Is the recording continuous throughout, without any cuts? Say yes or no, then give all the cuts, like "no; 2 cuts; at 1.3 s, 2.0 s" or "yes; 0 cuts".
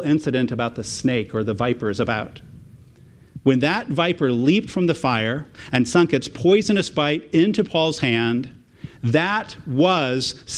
yes; 0 cuts